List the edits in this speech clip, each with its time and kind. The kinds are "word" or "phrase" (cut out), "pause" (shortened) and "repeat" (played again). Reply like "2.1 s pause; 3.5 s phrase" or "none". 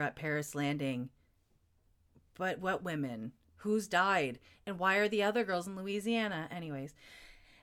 none